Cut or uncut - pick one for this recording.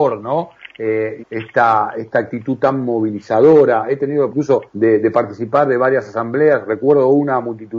cut